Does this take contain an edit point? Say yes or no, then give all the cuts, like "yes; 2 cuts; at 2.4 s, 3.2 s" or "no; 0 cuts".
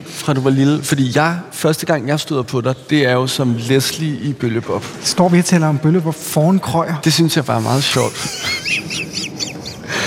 no; 0 cuts